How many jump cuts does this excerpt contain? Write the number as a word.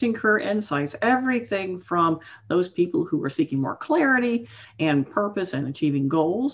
zero